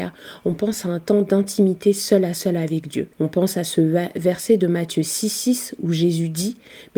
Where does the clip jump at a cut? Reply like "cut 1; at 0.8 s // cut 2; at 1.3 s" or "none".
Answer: cut 1; at 3.1 s

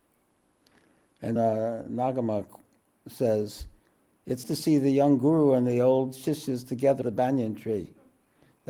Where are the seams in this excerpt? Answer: cut 1; at 1.4 s // cut 2; at 4.4 s // cut 3; at 7.0 s

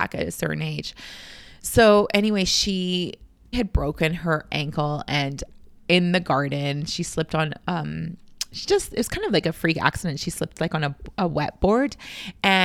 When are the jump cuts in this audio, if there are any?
cut 1; at 3.5 s

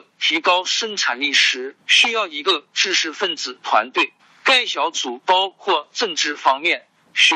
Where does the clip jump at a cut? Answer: cut 1; at 1.8 s // cut 2; at 4.2 s

